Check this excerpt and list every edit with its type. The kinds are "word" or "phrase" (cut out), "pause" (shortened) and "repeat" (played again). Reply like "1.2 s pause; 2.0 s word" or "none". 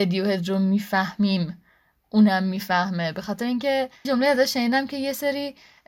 4.0 s word